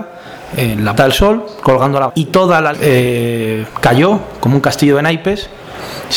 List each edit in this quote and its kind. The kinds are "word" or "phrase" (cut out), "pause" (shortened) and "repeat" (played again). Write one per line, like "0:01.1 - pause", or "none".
0:01.0 - word
0:02.1 - word
0:02.7 - word
0:03.7 - word